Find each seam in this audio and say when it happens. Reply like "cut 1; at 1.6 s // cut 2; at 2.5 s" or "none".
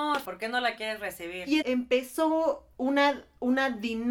cut 1; at 1.6 s